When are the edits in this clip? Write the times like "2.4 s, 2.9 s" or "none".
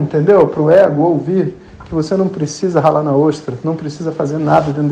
none